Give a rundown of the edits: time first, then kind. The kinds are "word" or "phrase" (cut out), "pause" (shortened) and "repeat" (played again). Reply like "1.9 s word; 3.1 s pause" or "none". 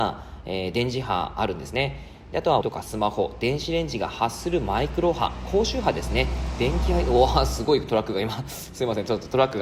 2.6 s phrase